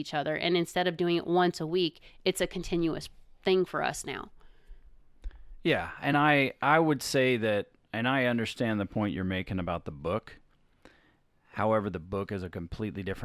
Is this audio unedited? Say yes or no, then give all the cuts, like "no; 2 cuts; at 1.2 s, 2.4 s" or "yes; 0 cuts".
yes; 0 cuts